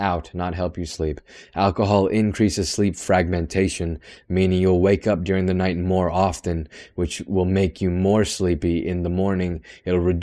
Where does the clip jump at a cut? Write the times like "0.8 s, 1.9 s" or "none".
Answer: none